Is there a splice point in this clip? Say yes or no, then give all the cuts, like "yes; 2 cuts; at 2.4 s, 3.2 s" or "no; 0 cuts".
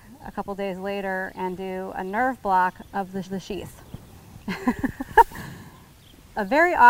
yes; 1 cut; at 3.2 s